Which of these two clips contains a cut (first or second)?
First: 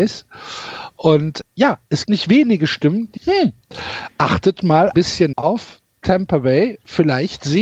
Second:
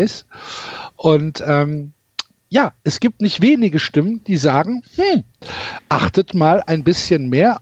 first